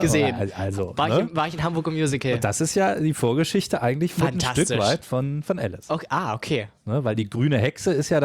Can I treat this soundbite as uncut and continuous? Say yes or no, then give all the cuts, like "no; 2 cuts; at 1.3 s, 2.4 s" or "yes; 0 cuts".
yes; 0 cuts